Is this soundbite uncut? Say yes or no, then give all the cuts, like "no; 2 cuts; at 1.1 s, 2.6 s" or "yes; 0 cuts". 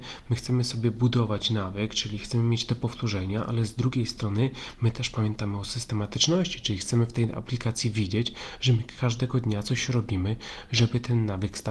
yes; 0 cuts